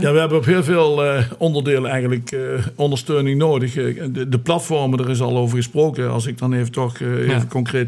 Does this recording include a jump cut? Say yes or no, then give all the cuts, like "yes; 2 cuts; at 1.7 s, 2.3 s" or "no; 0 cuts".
no; 0 cuts